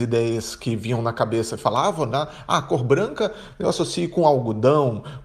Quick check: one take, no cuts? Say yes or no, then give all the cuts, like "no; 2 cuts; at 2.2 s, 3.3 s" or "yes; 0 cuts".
yes; 0 cuts